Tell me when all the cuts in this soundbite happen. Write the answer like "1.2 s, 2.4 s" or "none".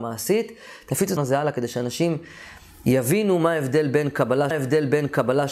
1.2 s, 4.5 s